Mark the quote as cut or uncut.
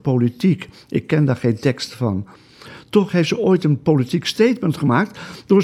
uncut